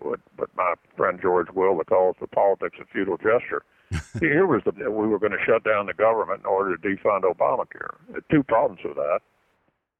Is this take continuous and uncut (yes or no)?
no